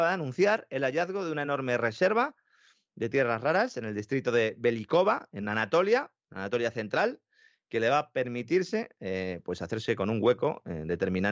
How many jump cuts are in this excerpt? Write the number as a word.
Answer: zero